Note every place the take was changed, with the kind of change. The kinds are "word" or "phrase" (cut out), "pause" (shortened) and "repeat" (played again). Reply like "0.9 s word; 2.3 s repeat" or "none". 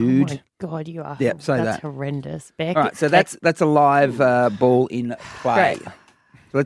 3.4 s word